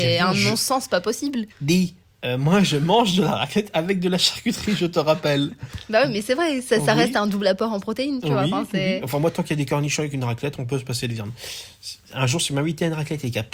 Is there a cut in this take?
yes; 1 cut; at 1.5 s

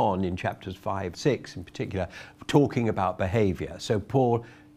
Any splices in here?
yes; 1 cut; at 1.1 s

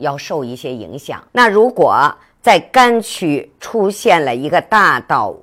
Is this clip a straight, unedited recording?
no; 1 cut; at 1.3 s

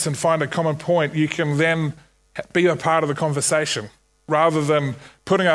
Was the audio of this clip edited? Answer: no; 0 cuts

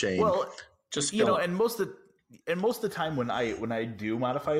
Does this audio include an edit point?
no; 0 cuts

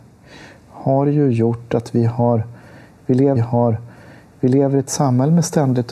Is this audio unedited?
no; 1 cut; at 3.4 s

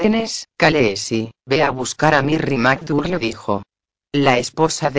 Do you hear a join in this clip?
yes; 1 cut; at 1.4 s

